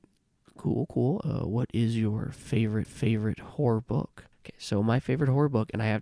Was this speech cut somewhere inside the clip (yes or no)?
yes